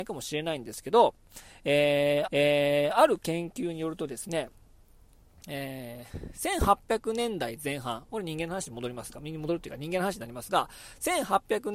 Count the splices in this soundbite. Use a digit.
1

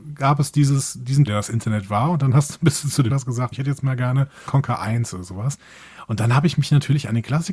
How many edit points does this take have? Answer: 4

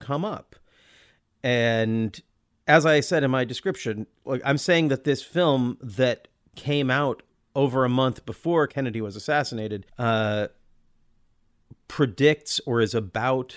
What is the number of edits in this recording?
2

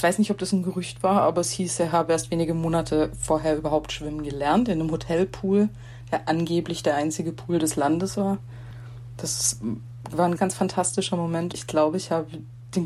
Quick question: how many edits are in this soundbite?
2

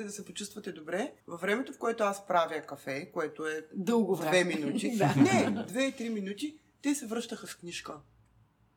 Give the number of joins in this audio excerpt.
1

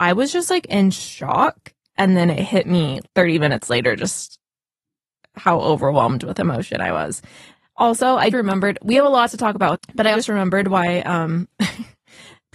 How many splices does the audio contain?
4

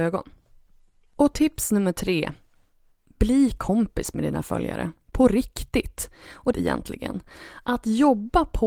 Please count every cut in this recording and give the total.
1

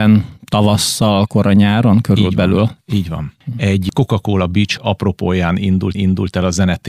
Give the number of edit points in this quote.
2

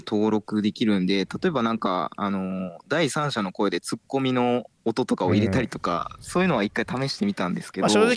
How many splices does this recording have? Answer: 1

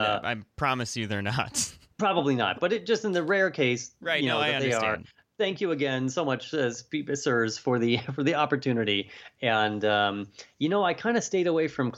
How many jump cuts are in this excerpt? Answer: 0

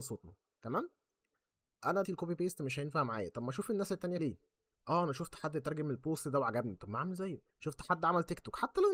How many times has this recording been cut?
3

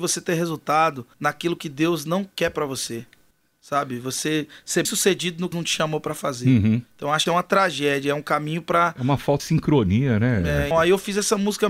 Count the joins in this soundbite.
8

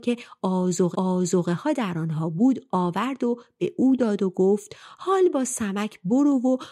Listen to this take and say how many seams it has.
1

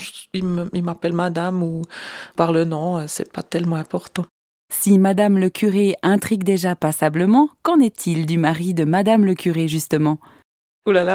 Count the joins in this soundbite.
0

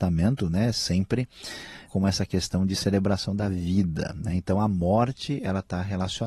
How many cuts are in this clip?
1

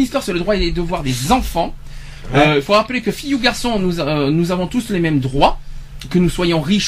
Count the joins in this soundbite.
0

